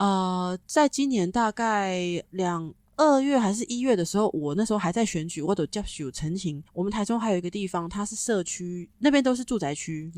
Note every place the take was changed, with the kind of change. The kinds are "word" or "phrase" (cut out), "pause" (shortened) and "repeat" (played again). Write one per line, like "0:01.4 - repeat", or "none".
0:06.7 - pause
0:08.9 - pause